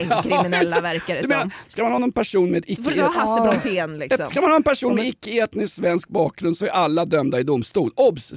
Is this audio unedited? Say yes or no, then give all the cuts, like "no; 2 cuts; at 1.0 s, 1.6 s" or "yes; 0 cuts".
yes; 0 cuts